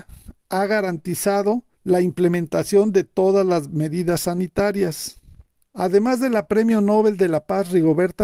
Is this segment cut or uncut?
cut